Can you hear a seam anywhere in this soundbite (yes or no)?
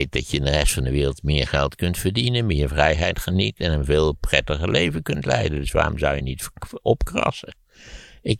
no